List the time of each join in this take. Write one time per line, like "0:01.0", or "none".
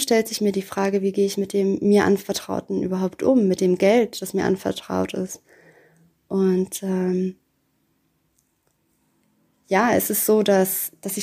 none

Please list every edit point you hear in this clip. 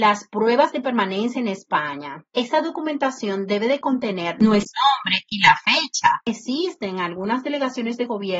0:02.3

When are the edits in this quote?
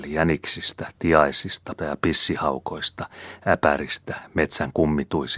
0:01.8

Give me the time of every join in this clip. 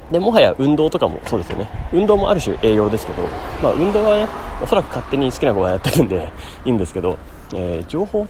none

